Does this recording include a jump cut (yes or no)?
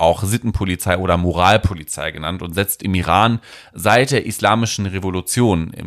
no